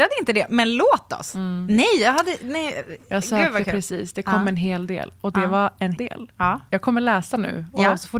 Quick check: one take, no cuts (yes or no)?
no